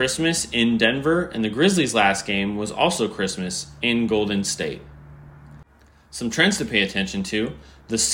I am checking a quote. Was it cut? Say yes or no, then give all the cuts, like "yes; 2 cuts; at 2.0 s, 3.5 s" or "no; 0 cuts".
no; 0 cuts